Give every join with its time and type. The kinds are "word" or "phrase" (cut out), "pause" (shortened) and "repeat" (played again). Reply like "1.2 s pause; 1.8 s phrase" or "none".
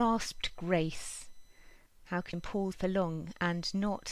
1.9 s pause; 2.3 s phrase; 2.7 s word